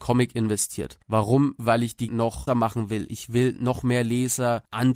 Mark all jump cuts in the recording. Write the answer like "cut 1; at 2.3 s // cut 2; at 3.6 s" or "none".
cut 1; at 1.0 s // cut 2; at 2.1 s // cut 3; at 2.5 s